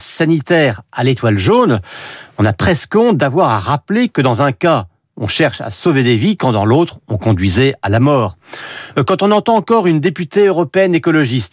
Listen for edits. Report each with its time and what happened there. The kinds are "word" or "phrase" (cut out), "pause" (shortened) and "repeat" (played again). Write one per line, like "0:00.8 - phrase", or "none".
none